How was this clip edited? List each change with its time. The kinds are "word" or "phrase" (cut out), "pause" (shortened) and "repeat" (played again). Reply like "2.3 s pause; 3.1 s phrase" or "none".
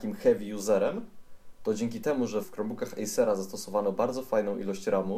2.4 s word